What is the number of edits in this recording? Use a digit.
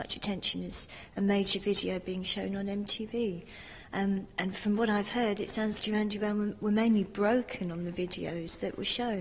1